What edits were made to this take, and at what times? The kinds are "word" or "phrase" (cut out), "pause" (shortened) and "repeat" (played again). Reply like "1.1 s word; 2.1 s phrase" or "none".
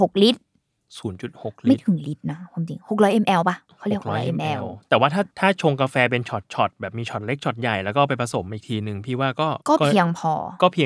5.3 s pause; 9.6 s pause